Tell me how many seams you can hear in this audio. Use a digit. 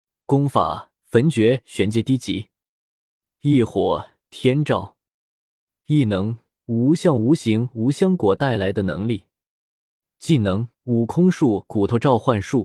1